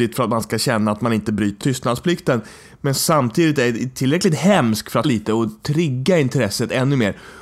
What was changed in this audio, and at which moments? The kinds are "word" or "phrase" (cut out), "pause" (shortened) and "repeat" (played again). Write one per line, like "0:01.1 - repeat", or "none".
0:01.6 - word
0:03.0 - word
0:05.0 - word